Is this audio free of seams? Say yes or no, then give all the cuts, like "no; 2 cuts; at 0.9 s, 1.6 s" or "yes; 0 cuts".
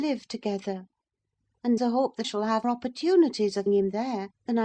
no; 4 cuts; at 1.8 s, 2.2 s, 2.6 s, 3.7 s